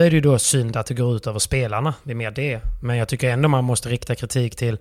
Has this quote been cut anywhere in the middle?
no; 0 cuts

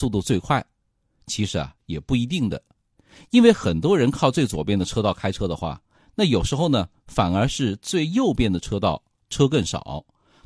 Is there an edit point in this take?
no; 0 cuts

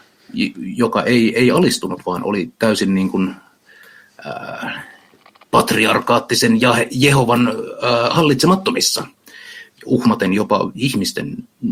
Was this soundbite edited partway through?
no; 0 cuts

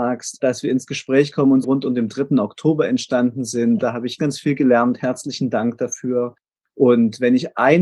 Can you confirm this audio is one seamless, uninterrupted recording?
no; 2 cuts; at 1.6 s, 4.2 s

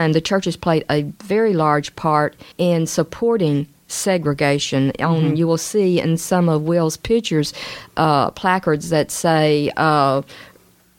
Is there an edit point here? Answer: yes; 1 cut; at 2.5 s

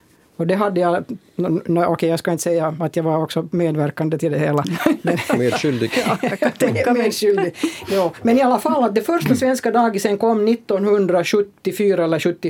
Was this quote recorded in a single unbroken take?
yes; 0 cuts

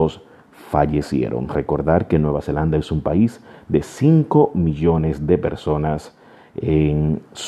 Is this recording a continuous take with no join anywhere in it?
yes; 0 cuts

